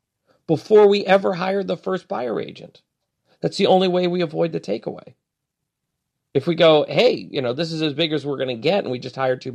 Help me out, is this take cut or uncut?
uncut